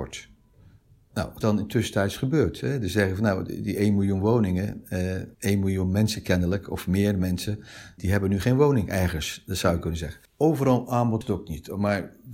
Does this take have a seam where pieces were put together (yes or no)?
yes